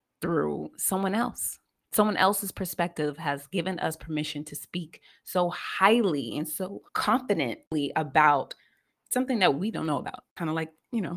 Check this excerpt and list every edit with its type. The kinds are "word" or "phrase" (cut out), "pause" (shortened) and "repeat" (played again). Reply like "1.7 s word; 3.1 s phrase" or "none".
6.9 s pause; 9.7 s word